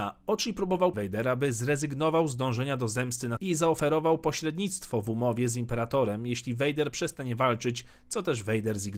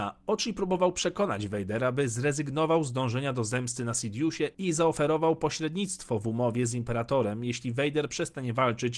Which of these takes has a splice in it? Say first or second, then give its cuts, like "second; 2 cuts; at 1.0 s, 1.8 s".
first; 2 cuts; at 0.9 s, 3.4 s